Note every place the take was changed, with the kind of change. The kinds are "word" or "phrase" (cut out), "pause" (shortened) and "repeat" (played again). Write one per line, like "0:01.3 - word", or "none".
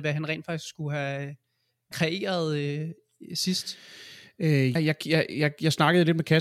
0:01.9 - word
0:04.8 - word

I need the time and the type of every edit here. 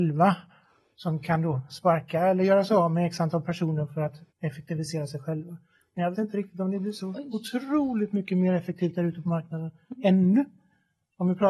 0:04.3 - pause
0:06.1 - word

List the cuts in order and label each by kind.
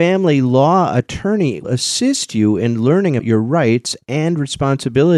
0:01.6 - word
0:03.2 - word

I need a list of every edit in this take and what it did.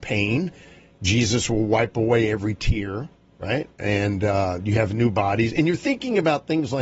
none

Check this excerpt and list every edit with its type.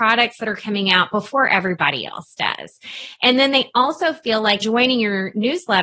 0:04.6 - word

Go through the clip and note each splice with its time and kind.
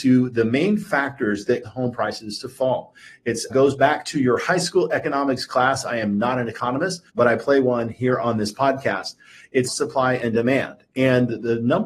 0:01.6 - word
0:03.5 - word
0:07.1 - pause
0:09.7 - word

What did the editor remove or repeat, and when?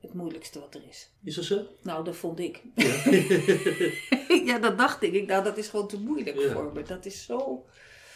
0:01.2 - pause

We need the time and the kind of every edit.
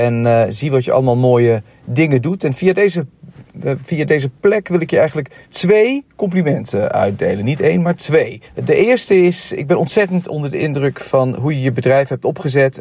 0:05.4 - pause
0:08.5 - pause

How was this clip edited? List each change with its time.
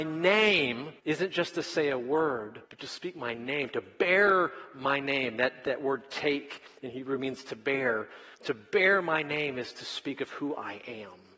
0:01.0 - pause
0:02.7 - pause
0:08.3 - pause

